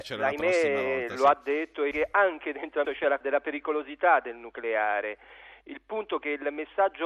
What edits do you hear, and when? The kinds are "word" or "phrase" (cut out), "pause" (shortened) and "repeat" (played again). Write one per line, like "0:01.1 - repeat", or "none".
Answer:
0:01.9 - word
0:02.8 - word
0:03.2 - word